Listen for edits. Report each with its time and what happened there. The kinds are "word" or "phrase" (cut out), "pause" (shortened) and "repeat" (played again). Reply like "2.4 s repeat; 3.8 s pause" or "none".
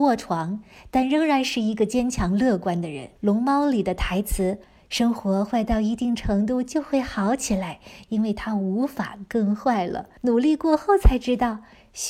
3.2 s pause; 4.6 s pause; 10.2 s pause